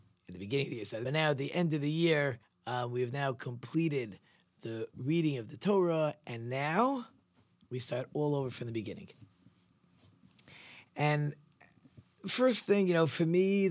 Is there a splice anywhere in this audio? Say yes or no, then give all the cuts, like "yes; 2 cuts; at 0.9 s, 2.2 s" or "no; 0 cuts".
yes; 2 cuts; at 1.0 s, 2.4 s